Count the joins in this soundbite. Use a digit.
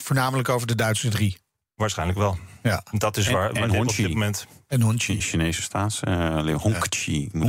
0